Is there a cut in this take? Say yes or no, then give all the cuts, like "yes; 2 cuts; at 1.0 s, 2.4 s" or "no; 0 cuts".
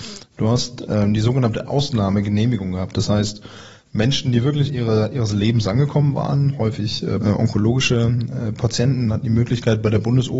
yes; 2 cuts; at 4.7 s, 7.2 s